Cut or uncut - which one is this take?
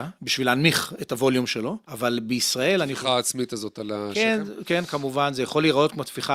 cut